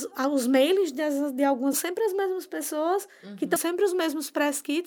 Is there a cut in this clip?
yes; 2 cuts; at 1.7 s, 3.6 s

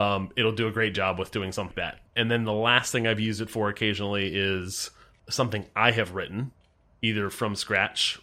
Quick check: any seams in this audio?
yes; 2 cuts; at 1.7 s, 2.1 s

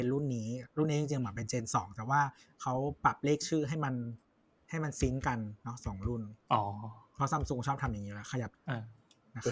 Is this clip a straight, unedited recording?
yes; 0 cuts

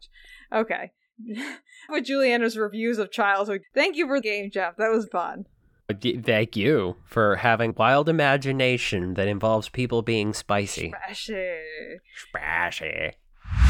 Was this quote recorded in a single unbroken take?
no; 6 cuts; at 1.9 s, 3.6 s, 4.2 s, 5.1 s, 5.9 s, 7.7 s

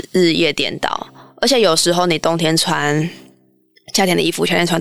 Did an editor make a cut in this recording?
no; 0 cuts

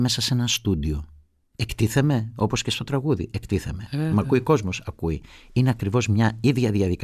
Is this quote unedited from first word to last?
yes; 0 cuts

